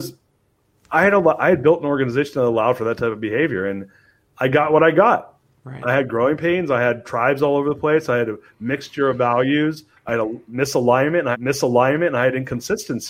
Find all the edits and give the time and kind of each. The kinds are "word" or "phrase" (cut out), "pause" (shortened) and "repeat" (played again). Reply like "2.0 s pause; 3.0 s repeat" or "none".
11.3 s repeat